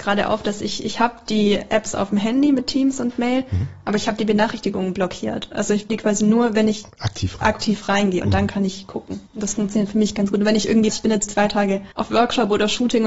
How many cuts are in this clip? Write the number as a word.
six